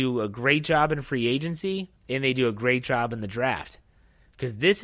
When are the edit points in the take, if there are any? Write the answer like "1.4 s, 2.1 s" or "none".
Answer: 2.0 s